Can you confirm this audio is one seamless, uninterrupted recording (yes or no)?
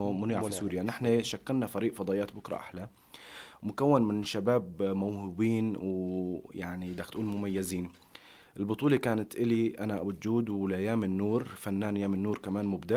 yes